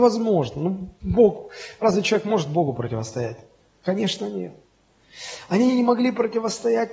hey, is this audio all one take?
yes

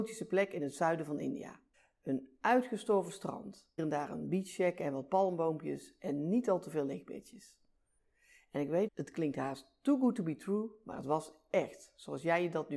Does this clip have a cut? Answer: yes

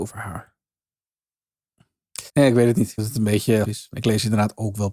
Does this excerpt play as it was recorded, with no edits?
no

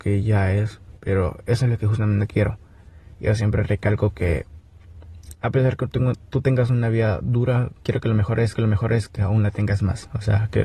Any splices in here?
yes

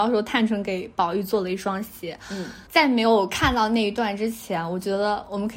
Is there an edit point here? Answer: yes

